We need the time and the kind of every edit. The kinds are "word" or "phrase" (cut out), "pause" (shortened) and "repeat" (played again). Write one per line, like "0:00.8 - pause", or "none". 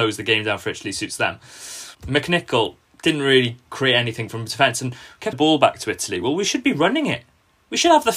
0:01.9 - pause
0:05.3 - phrase